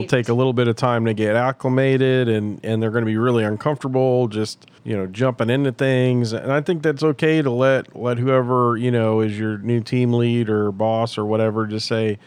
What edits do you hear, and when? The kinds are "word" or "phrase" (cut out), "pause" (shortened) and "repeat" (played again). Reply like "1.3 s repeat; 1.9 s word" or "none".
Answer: 4.8 s pause